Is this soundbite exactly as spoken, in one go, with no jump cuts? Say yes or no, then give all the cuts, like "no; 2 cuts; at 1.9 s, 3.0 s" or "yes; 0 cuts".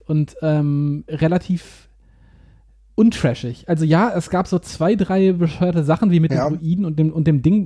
yes; 0 cuts